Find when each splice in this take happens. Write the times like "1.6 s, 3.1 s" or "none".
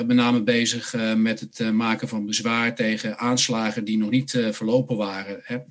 none